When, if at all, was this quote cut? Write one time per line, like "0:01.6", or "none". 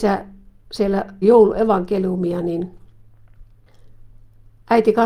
0:01.2